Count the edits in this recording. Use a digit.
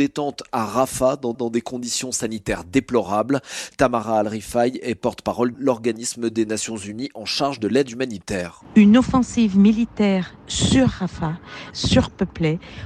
2